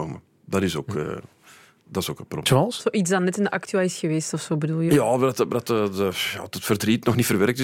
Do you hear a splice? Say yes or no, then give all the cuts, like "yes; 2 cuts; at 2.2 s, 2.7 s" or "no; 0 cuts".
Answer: no; 0 cuts